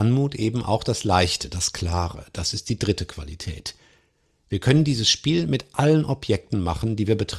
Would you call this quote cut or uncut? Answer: uncut